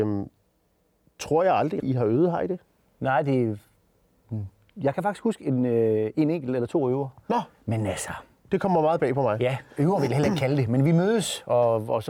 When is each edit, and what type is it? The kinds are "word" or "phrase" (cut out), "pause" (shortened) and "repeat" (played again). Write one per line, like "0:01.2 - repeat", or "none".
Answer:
0:01.8 - word